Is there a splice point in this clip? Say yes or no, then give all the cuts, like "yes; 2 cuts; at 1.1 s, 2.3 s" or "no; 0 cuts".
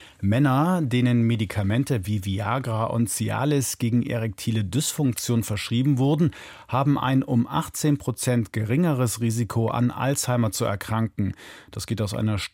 no; 0 cuts